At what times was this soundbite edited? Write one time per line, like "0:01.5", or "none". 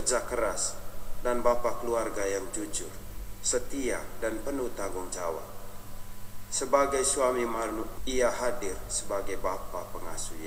0:08.0

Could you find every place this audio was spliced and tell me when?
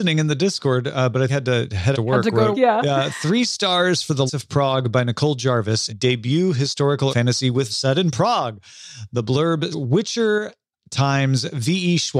0:01.3
0:01.9
0:02.5
0:04.3
0:05.9
0:07.1
0:07.7
0:09.7

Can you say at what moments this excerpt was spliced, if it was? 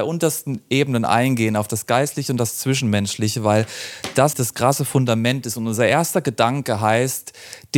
0:04.3

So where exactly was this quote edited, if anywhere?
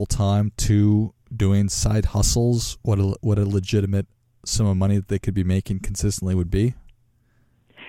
none

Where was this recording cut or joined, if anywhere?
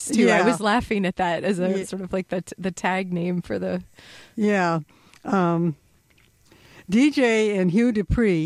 none

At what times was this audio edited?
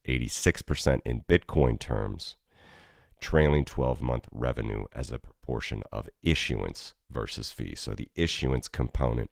none

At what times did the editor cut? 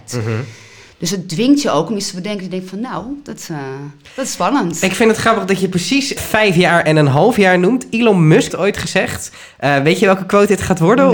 0:06.2
0:08.5

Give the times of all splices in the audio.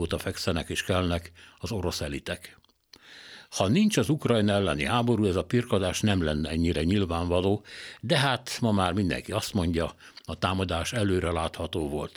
none

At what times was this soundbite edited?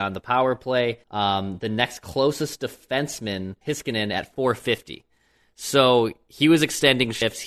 0:01.0
0:03.6

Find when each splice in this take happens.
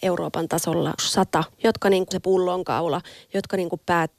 0:01.0
0:01.5
0:02.1

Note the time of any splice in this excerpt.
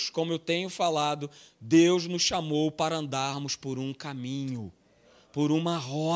none

